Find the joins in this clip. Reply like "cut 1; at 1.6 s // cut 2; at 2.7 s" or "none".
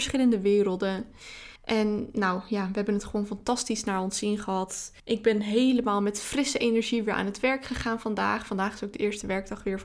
cut 1; at 1.6 s // cut 2; at 5.0 s